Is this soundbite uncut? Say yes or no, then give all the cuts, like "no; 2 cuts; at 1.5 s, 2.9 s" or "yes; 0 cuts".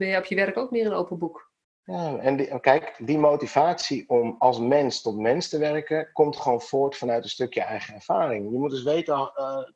yes; 0 cuts